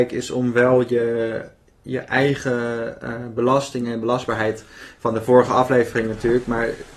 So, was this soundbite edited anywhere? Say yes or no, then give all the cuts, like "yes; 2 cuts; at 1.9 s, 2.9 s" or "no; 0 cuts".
no; 0 cuts